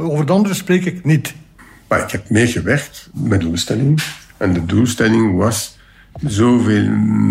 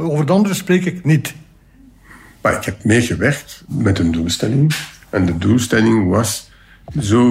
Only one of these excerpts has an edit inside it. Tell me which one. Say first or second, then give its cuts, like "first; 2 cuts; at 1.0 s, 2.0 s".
first; 2 cuts; at 1.6 s, 3.4 s